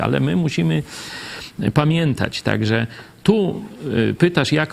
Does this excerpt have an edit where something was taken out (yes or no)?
no